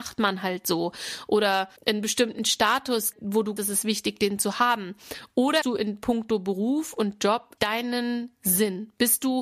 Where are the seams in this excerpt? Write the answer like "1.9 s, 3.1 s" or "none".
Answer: 1.8 s, 3.1 s, 3.6 s, 5.6 s, 7.6 s